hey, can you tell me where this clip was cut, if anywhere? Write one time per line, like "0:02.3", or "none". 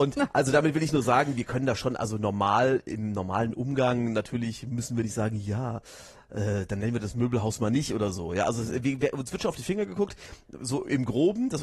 none